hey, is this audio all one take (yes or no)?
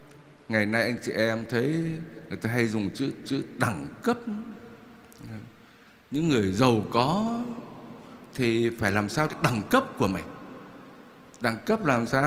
no